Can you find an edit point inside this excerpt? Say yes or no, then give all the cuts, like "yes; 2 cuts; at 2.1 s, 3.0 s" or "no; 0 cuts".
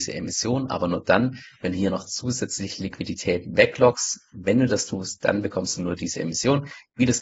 no; 0 cuts